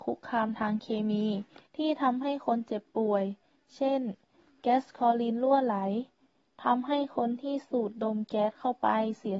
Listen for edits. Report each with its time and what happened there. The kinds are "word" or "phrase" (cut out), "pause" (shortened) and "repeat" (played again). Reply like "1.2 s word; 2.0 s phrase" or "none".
1.7 s pause